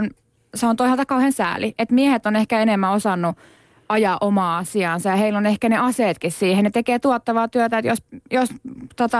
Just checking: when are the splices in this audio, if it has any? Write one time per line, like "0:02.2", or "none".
none